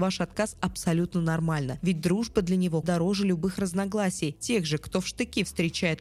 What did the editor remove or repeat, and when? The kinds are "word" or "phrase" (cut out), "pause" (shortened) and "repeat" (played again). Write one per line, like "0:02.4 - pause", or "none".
0:02.8 - word